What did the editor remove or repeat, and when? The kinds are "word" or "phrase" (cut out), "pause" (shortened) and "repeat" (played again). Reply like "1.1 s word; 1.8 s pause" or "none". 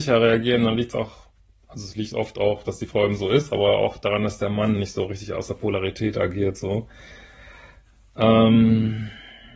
none